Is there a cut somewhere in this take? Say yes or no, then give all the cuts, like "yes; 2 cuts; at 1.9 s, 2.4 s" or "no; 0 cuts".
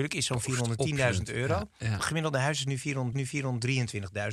yes; 2 cuts; at 2.0 s, 3.1 s